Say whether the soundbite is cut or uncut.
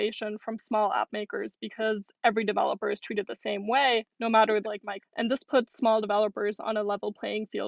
cut